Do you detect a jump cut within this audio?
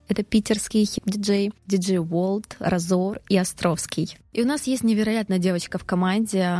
no; 0 cuts

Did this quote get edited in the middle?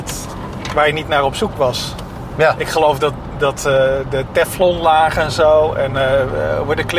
no; 0 cuts

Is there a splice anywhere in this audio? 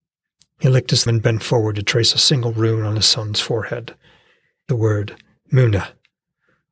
yes; 2 cuts; at 1.1 s, 4.7 s

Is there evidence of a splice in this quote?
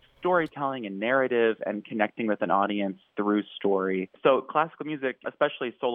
no; 0 cuts

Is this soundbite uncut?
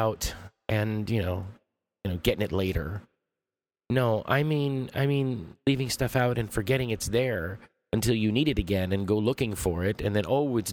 yes; 0 cuts

